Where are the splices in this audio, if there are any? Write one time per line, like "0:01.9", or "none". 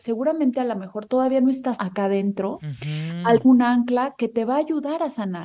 0:01.8
0:03.4